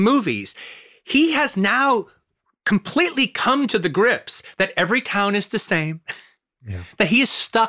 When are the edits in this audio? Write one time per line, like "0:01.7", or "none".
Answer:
none

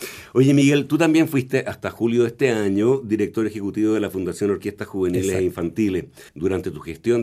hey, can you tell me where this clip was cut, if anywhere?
0:06.3

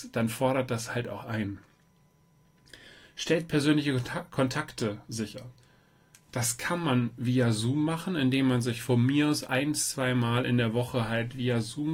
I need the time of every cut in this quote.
none

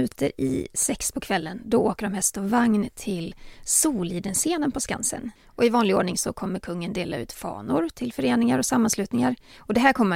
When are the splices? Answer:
0:05.4

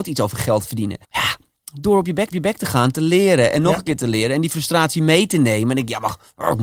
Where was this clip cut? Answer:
0:01.0
0:02.3

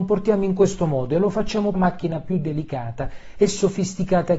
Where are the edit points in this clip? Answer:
0:01.7

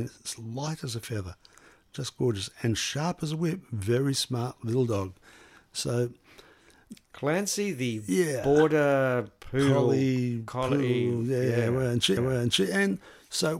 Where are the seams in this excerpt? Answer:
0:12.2

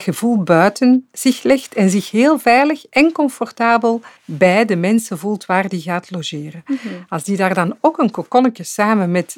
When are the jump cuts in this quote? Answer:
0:04.2

